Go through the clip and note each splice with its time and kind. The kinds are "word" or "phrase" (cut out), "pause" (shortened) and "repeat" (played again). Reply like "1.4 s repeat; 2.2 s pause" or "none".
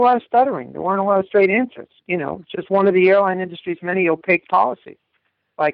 none